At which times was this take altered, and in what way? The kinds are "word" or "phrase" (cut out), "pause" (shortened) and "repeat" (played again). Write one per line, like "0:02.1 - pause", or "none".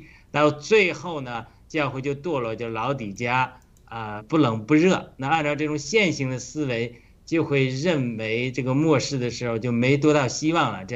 0:04.2 - word